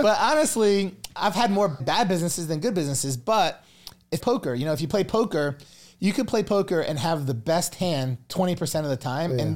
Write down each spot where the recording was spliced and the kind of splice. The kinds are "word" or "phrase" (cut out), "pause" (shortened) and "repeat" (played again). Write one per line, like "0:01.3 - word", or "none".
0:01.8 - word
0:04.2 - word

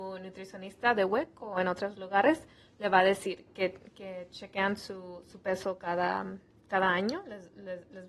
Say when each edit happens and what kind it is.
none

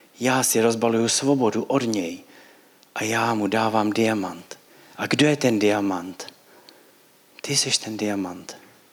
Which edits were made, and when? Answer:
none

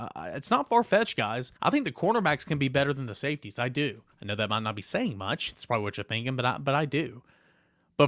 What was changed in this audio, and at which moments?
0:01.6 - pause
0:04.1 - pause

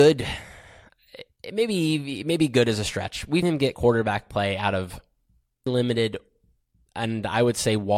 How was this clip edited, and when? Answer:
0:03.4 - word
0:03.7 - word
0:05.7 - word

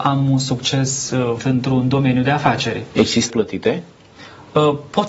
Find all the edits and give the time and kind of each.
0:01.4 - word
0:03.3 - word

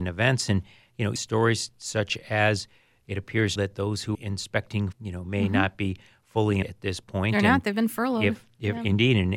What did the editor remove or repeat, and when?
0:01.2 - word
0:03.6 - word
0:04.1 - word
0:04.9 - word
0:06.6 - word

